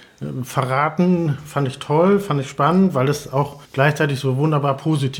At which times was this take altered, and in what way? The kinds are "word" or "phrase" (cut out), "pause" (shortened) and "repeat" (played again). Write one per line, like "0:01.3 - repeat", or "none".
0:03.6 - pause

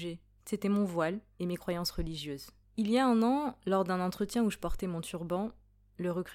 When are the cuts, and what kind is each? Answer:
0:01.4 - phrase
0:02.6 - pause

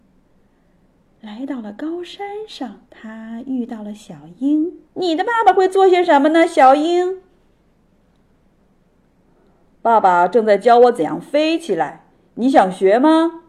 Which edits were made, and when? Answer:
0:02.9 - pause
0:04.9 - pause

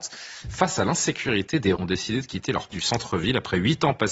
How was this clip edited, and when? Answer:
0:01.8 - word
0:02.7 - word

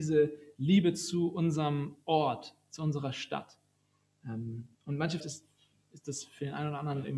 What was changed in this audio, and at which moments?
0:04.7 - pause
0:05.2 - phrase

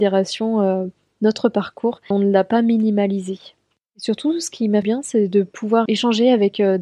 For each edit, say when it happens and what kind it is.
0:02.1 - word
0:04.8 - phrase
0:05.9 - word

